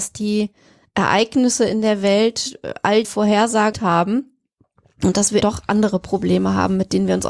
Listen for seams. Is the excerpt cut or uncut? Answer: cut